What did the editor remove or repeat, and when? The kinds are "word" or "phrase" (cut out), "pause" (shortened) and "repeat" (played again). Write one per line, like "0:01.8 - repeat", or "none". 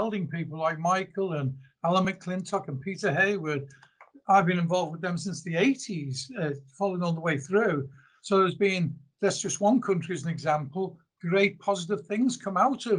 none

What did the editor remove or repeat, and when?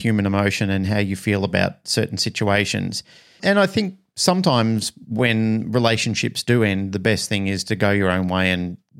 none

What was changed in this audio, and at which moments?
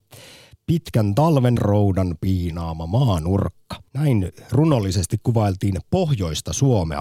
0:01.6 - phrase
0:03.9 - pause

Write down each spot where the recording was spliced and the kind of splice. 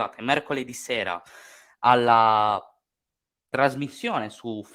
none

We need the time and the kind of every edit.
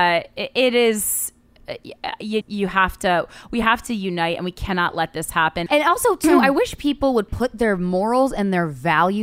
0:02.4 - word
0:05.7 - word

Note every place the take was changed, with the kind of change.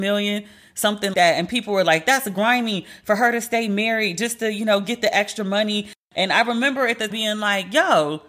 0:01.1 - word
0:07.1 - word

